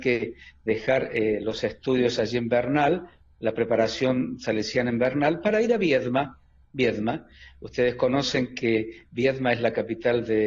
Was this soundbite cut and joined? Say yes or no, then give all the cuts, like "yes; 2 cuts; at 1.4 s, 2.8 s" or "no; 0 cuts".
no; 0 cuts